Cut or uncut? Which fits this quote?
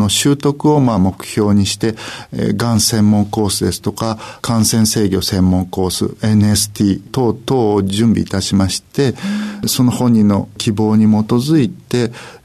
uncut